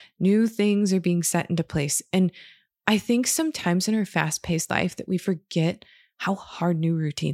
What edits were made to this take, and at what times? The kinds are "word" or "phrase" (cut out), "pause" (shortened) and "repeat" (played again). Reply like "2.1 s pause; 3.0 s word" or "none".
none